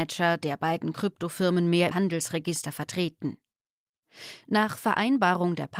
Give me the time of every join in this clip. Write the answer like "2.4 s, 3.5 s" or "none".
1.9 s